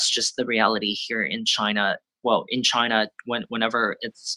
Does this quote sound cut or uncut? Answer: uncut